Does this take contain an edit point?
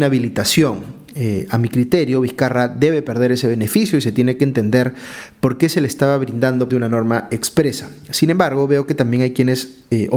yes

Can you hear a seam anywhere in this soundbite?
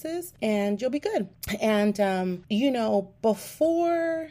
no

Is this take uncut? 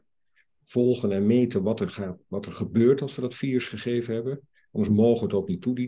yes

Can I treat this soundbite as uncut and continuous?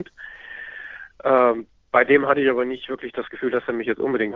yes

